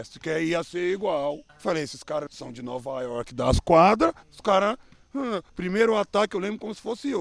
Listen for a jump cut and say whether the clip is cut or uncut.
cut